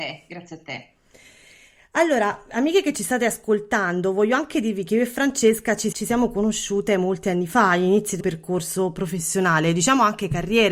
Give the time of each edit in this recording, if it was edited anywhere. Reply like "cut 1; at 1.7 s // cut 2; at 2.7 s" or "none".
cut 1; at 5.9 s // cut 2; at 8.2 s